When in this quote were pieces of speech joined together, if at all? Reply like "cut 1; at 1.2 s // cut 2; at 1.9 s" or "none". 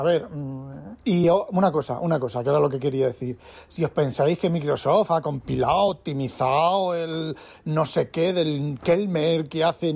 none